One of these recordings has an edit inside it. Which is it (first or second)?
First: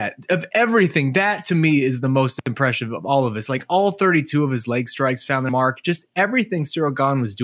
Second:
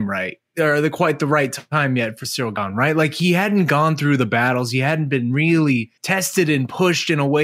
second